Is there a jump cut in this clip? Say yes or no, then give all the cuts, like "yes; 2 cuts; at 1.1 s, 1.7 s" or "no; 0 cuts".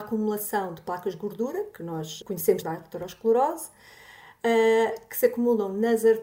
yes; 2 cuts; at 2.2 s, 2.6 s